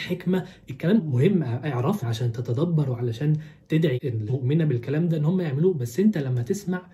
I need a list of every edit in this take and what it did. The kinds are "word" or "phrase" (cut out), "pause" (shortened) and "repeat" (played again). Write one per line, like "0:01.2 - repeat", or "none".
0:01.0 - word
0:02.0 - word
0:04.0 - word
0:04.3 - word